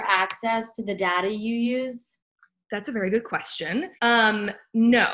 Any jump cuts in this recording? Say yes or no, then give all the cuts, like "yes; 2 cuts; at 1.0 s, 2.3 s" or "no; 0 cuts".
yes; 1 cut; at 4.0 s